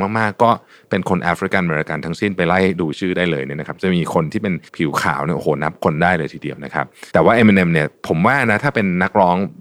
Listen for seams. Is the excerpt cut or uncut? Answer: cut